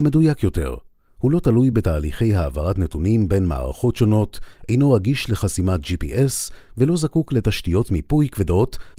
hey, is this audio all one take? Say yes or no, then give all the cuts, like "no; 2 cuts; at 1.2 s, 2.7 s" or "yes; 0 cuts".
yes; 0 cuts